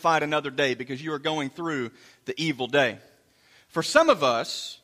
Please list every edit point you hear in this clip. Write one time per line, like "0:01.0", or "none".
none